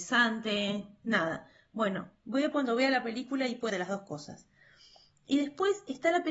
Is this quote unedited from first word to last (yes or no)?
no